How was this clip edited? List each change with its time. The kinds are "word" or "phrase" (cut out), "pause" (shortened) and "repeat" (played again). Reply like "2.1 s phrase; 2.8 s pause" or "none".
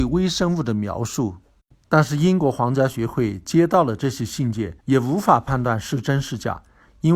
4.8 s pause